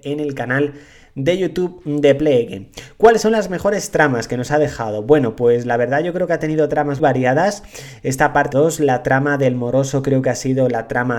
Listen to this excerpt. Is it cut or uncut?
cut